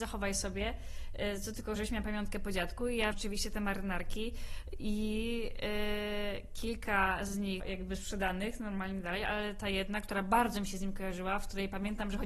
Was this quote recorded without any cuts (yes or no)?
no